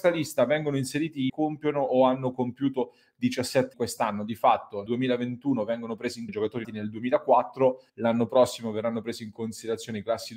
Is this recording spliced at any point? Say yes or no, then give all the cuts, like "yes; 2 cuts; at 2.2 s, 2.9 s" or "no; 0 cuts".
yes; 6 cuts; at 1.3 s, 3.7 s, 4.9 s, 6.3 s, 6.6 s, 7.9 s